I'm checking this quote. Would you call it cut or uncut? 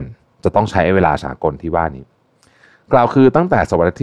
uncut